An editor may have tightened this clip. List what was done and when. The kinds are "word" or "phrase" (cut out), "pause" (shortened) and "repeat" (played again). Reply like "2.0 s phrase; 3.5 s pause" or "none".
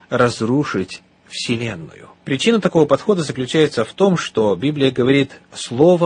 2.2 s pause